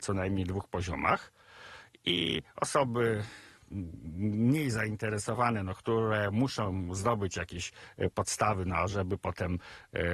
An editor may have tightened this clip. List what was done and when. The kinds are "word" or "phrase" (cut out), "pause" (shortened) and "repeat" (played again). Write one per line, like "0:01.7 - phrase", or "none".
none